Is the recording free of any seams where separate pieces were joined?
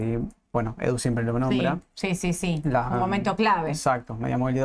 yes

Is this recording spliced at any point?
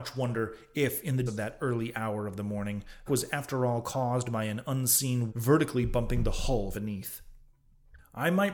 yes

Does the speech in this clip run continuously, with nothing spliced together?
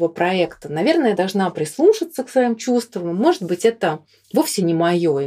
yes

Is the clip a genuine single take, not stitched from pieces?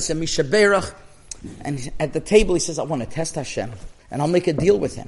no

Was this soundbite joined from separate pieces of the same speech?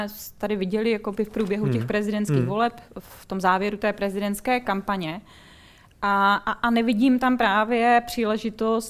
no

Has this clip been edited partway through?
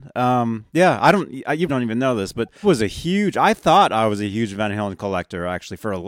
yes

